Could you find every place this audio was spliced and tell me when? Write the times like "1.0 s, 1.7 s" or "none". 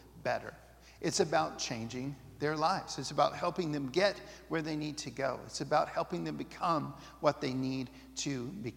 none